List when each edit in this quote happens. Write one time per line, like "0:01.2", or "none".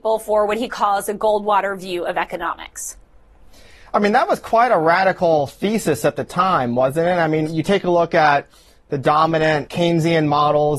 0:07.4
0:09.7